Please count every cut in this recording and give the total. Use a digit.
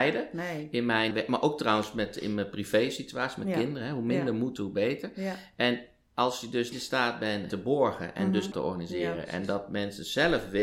4